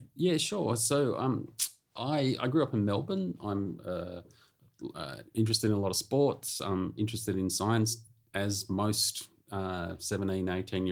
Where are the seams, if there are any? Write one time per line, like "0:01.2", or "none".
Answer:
none